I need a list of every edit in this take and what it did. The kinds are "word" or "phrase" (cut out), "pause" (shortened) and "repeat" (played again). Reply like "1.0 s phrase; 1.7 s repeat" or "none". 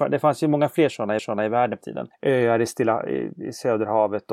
1.2 s repeat; 1.8 s word; 2.1 s pause